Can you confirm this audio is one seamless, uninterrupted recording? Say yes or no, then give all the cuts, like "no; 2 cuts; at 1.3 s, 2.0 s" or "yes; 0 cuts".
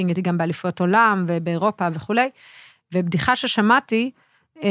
yes; 0 cuts